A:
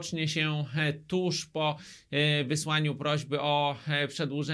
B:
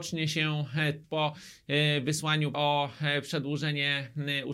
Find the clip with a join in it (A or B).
B